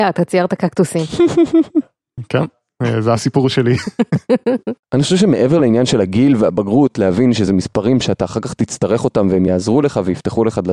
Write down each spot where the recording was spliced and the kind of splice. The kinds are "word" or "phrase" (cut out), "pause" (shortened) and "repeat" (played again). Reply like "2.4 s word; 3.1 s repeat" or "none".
none

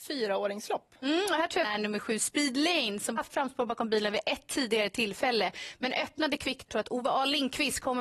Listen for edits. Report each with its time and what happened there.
1.6 s word; 3.2 s phrase; 6.7 s phrase

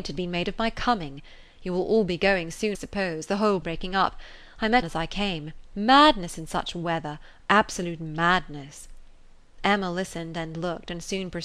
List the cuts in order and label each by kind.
2.7 s word; 3.6 s word; 4.8 s word

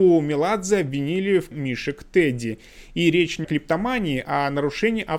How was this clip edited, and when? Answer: 1.5 s word; 3.4 s word

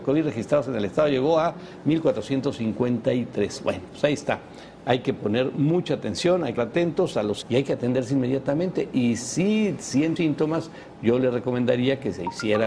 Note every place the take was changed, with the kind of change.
6.6 s word; 7.4 s word; 10.2 s word

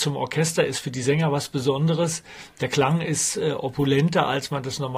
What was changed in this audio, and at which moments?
none

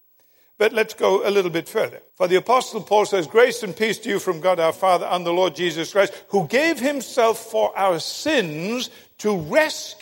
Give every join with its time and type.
2.1 s pause

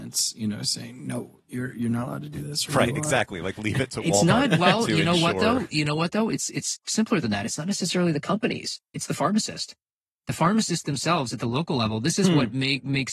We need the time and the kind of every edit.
none

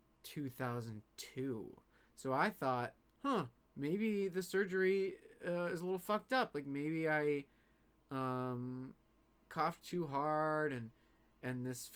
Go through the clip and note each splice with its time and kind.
none

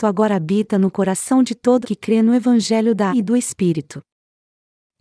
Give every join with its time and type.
1.8 s word; 3.1 s word

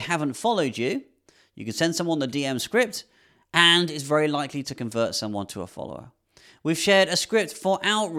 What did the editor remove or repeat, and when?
none

